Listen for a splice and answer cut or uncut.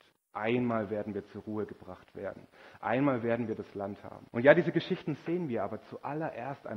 cut